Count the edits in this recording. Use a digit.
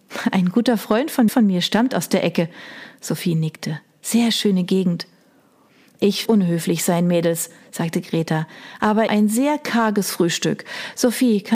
3